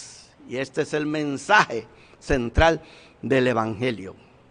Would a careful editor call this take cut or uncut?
uncut